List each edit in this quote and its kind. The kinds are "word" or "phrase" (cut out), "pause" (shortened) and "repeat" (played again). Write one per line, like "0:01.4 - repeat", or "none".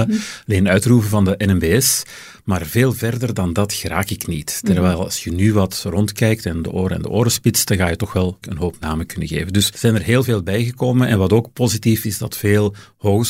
0:08.4 - word
0:09.7 - word
0:12.0 - word

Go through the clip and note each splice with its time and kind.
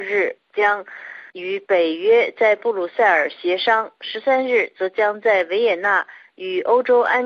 0:01.3 - pause

